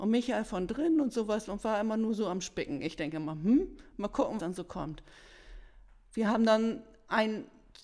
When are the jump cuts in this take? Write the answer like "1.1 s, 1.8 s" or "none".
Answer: 4.4 s